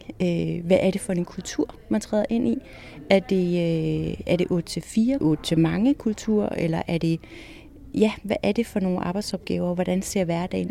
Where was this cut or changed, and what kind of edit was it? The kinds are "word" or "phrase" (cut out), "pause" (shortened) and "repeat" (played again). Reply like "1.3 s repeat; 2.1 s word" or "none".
5.2 s phrase